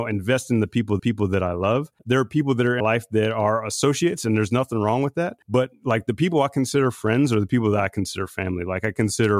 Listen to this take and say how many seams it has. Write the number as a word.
four